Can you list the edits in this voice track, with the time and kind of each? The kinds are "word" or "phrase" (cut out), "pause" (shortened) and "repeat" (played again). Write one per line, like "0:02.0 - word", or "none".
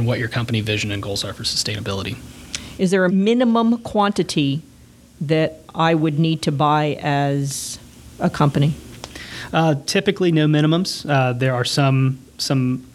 0:03.1 - word